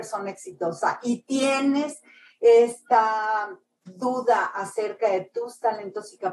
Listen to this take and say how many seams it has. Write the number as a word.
zero